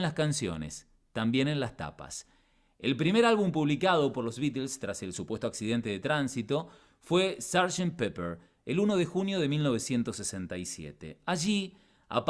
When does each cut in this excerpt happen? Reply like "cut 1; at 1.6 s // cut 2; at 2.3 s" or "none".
none